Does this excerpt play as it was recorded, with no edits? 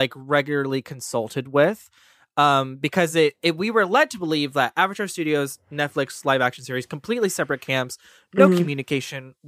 yes; 0 cuts

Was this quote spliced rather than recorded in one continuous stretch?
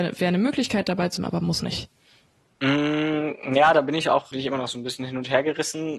yes; 3 cuts; at 1.2 s, 1.6 s, 4.3 s

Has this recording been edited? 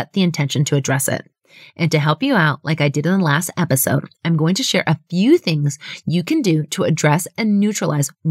no; 0 cuts

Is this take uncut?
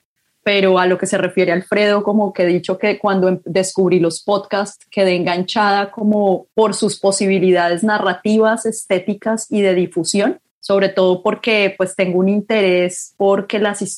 no; 2 cuts; at 6.5 s, 10.5 s

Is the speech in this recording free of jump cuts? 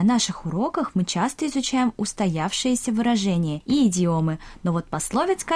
yes; 0 cuts

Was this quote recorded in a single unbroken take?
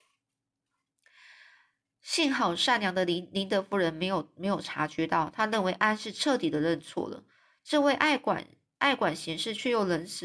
yes; 0 cuts

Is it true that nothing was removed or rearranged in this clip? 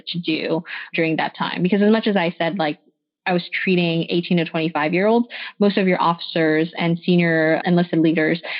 yes; 0 cuts

